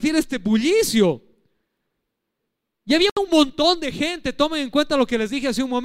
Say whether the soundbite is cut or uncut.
uncut